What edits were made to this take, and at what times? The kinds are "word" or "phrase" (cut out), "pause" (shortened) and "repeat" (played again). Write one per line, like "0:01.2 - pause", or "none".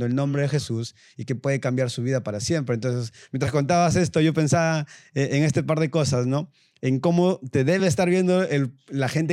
none

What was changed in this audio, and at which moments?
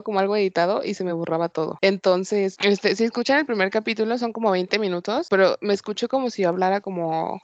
none

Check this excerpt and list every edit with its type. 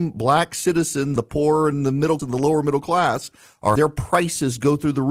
0:01.2 - word
0:02.2 - word
0:03.8 - word

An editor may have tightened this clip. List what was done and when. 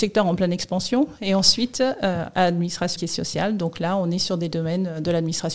0:03.0 - word

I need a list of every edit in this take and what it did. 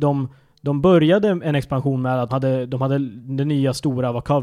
0:02.3 - word

